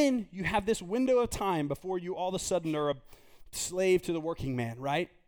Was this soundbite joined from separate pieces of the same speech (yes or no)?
no